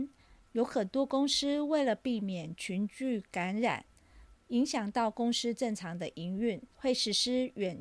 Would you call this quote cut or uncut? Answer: cut